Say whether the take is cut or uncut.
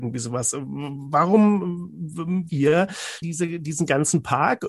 cut